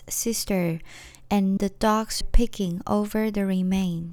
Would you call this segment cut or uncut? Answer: cut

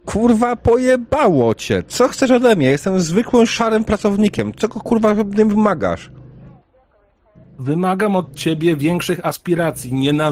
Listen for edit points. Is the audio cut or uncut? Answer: uncut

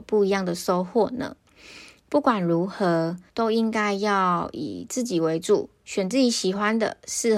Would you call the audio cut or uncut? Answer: cut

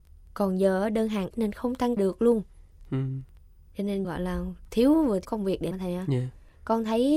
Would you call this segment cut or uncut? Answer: cut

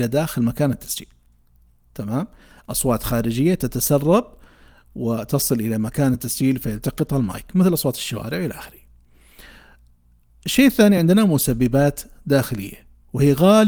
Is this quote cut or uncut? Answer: uncut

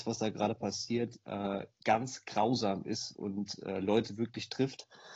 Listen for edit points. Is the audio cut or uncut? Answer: uncut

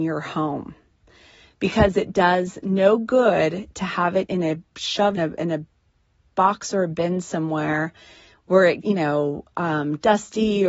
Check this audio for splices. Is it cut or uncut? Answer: cut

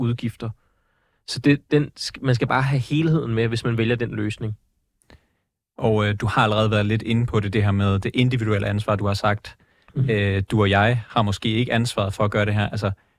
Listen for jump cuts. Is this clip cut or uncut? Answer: uncut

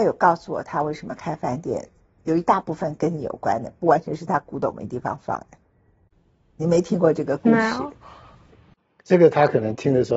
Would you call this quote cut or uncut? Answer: uncut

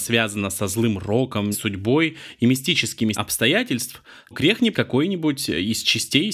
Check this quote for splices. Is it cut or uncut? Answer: cut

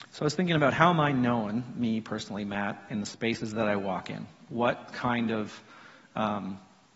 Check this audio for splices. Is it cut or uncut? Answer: uncut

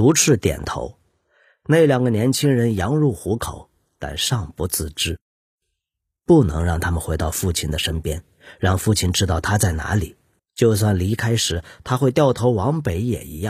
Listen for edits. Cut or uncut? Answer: cut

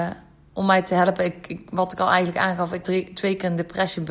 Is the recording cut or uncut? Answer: cut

